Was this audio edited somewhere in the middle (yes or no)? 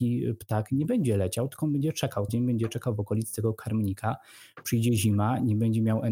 yes